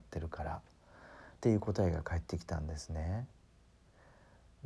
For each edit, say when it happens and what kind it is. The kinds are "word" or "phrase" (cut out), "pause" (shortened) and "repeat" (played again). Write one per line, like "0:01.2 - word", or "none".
0:01.4 - pause